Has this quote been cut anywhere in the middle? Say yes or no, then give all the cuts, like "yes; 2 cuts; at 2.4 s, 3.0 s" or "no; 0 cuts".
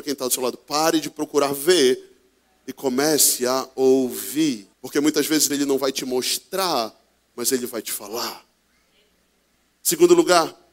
yes; 2 cuts; at 4.7 s, 5.5 s